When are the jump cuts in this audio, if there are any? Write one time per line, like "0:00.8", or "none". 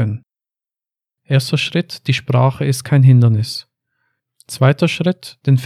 none